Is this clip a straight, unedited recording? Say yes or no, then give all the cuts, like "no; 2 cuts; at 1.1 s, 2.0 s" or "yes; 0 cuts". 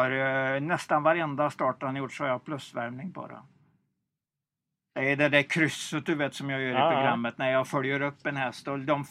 yes; 0 cuts